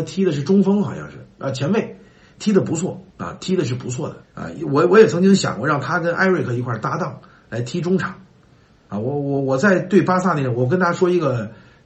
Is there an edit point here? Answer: yes; 2 cuts; at 3.1 s, 4.2 s

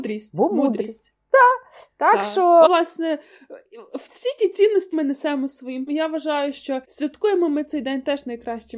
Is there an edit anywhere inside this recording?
yes; 4 cuts; at 2.7 s, 4.9 s, 5.9 s, 6.8 s

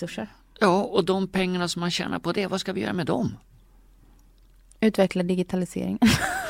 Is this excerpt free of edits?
yes; 0 cuts

